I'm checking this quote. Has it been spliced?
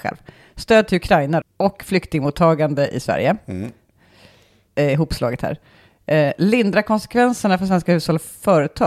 yes; 1 cut; at 1.4 s

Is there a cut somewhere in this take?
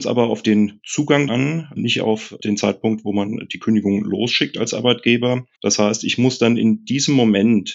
yes; 2 cuts; at 1.3 s, 5.5 s

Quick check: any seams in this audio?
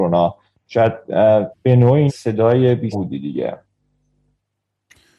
yes; 3 cuts; at 1.5 s, 2.1 s, 2.9 s

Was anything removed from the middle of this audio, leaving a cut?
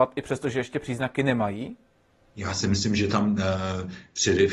no; 0 cuts

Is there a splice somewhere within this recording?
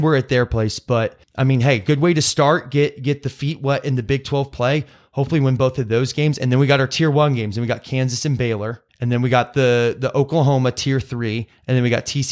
yes; 2 cuts; at 1.2 s, 8.9 s

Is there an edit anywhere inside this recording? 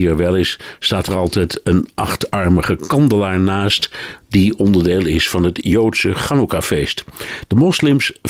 no; 0 cuts

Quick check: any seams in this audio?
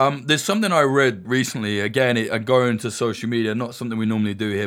yes; 1 cut; at 1.2 s

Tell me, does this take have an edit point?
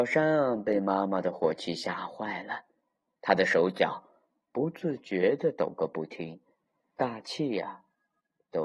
no; 0 cuts

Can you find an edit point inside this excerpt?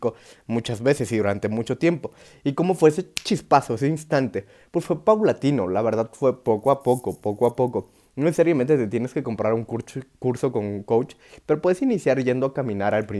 no; 0 cuts

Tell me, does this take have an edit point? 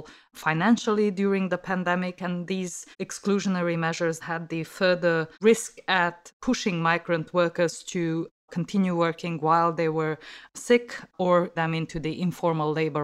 yes; 4 cuts; at 2.9 s, 4.2 s, 5.3 s, 11.6 s

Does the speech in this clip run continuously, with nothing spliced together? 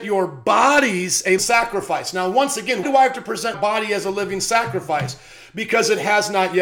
no; 3 cuts; at 1.4 s, 2.8 s, 3.5 s

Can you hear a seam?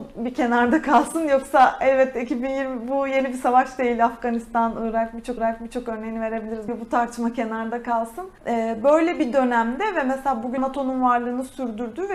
yes; 4 cuts; at 5.4 s, 6.7 s, 8.4 s, 10.6 s

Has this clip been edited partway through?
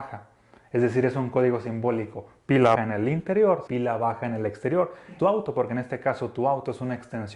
yes; 3 cuts; at 2.8 s, 3.7 s, 5.2 s

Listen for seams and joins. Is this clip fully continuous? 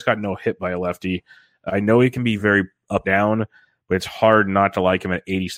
no; 3 cuts; at 1.7 s, 2.4 s, 3.0 s

